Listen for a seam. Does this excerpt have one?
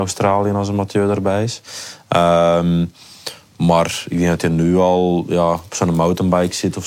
no; 0 cuts

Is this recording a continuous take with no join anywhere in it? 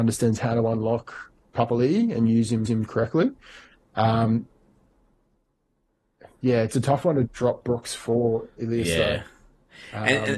no; 2 cuts; at 2.7 s, 7.3 s

